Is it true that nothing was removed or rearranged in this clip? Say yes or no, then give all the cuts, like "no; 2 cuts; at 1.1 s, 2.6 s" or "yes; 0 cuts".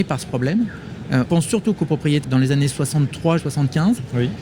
no; 3 cuts; at 1.2 s, 2.2 s, 3.4 s